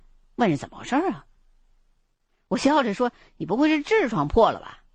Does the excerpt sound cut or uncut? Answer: uncut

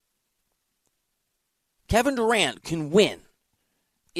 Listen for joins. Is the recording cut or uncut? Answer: uncut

